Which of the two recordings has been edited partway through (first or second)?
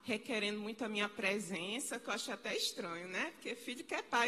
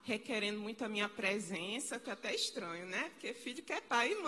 second